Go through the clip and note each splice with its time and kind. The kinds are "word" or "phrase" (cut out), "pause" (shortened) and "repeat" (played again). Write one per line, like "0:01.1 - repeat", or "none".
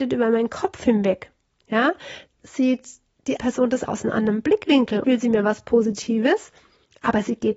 0:02.3 - word
0:03.4 - word
0:03.8 - word
0:05.0 - word